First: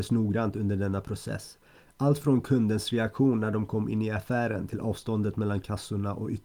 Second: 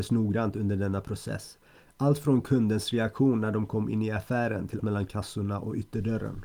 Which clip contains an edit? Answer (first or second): second